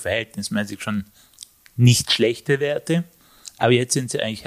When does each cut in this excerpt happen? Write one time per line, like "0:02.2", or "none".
none